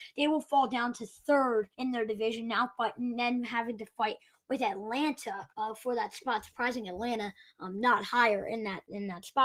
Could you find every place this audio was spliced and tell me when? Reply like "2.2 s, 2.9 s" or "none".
1.7 s, 5.5 s